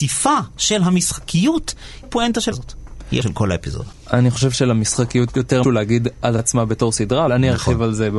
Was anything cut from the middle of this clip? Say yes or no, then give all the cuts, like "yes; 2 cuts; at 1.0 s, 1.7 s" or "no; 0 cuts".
yes; 8 cuts; at 2.0 s, 2.5 s, 3.2 s, 4.5 s, 5.3 s, 5.6 s, 6.4 s, 7.3 s